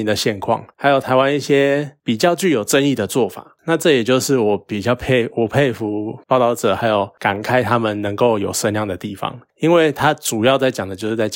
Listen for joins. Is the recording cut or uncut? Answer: cut